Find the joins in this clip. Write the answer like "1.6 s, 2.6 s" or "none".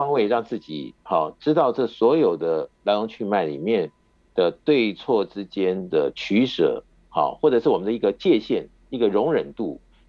none

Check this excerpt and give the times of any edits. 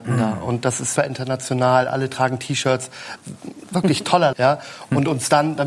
1.0 s, 4.3 s

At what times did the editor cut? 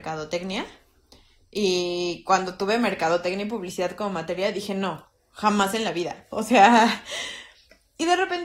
none

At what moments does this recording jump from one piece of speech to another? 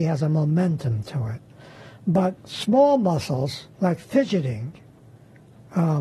2.4 s, 3.7 s

